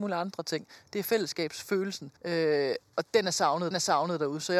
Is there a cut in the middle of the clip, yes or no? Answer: yes